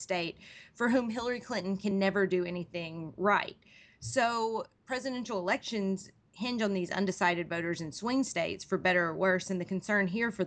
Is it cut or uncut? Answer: uncut